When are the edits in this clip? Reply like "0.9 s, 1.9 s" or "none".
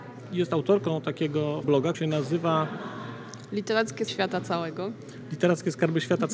1.6 s, 1.9 s, 4.1 s